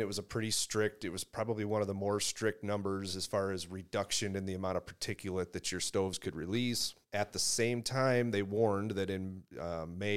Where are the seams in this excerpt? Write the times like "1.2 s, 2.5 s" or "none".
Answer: 7.0 s